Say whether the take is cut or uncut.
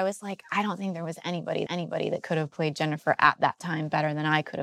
cut